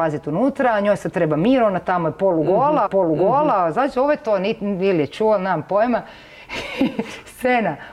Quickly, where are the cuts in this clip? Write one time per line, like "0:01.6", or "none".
0:02.9